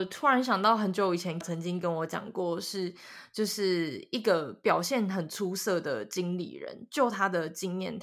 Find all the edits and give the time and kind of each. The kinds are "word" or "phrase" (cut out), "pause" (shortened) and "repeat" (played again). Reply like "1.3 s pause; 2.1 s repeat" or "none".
1.4 s word